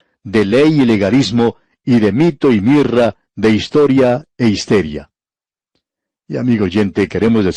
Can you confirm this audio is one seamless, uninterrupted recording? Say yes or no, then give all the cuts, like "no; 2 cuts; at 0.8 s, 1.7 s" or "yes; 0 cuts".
yes; 0 cuts